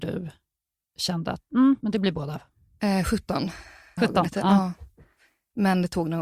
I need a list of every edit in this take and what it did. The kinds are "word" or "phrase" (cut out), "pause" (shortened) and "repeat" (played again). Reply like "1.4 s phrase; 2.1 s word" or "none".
1.8 s word; 4.0 s word